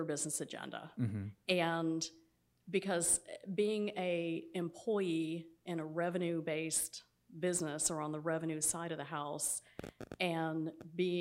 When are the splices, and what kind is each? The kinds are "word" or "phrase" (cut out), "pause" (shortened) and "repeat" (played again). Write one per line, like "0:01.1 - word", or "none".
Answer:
none